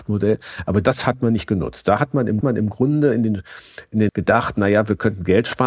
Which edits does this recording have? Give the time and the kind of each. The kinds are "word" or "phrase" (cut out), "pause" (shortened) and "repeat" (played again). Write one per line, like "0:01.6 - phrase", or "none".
0:02.4 - repeat
0:04.1 - word